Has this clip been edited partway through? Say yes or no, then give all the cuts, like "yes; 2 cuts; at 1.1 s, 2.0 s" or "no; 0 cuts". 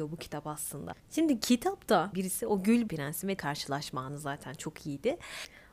yes; 4 cuts; at 1.0 s, 2.1 s, 2.9 s, 3.4 s